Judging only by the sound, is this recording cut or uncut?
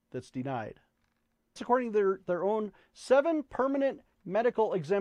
cut